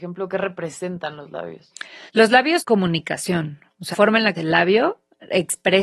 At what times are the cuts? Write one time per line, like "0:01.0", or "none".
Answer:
0:02.1
0:02.6
0:03.9
0:04.3